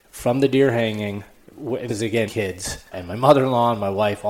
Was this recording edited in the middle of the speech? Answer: yes; 3 cuts; at 1.9 s, 2.3 s, 2.9 s

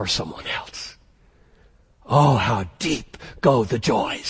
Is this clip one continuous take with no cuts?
yes; 0 cuts

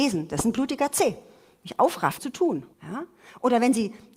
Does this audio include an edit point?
yes; 2 cuts; at 2.2 s, 2.7 s

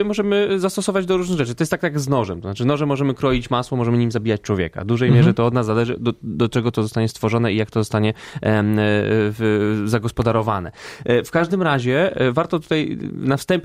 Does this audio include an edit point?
no; 0 cuts

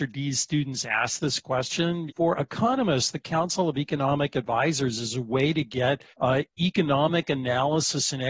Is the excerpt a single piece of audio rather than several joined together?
no; 2 cuts; at 2.1 s, 6.1 s

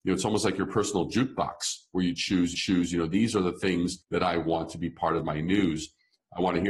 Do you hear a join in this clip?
yes; 2 cuts; at 2.5 s, 4.0 s

